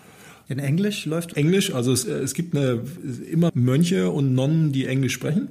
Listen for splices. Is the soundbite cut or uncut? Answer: cut